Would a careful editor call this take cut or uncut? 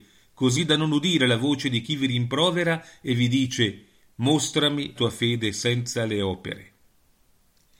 cut